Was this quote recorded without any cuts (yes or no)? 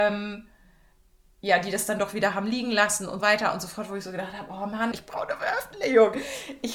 no